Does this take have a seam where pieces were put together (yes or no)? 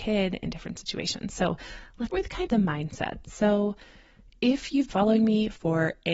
yes